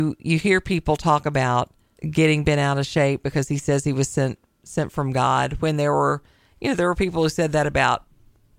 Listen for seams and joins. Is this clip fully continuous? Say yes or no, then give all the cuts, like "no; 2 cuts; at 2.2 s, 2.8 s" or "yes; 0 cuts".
no; 1 cut; at 1.9 s